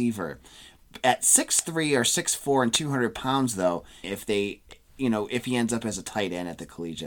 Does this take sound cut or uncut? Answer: cut